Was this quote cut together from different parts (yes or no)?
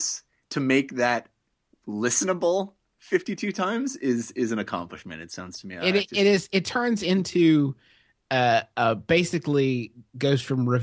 no